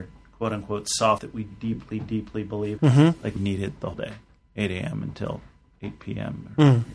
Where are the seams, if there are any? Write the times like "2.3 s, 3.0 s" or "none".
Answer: 1.2 s, 1.5 s, 2.8 s, 3.4 s, 3.9 s, 4.4 s